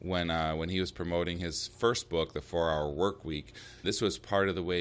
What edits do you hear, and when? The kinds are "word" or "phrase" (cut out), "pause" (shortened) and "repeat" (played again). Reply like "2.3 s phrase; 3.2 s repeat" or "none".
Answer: 3.8 s word